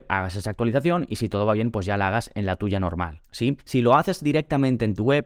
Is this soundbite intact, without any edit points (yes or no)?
no